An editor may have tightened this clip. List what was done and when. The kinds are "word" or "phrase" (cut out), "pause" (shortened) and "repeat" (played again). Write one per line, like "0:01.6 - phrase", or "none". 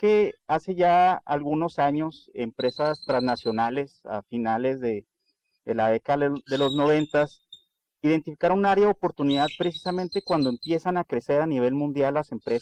none